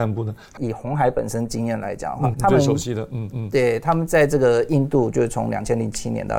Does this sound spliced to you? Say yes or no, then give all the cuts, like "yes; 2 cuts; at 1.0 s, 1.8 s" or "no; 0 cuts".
yes; 2 cuts; at 2.3 s, 3.3 s